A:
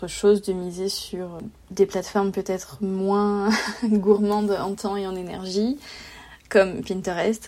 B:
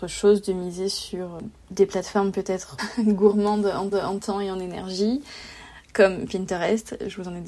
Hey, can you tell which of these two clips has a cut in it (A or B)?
B